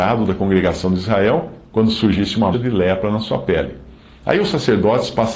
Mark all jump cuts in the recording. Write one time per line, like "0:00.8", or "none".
0:02.5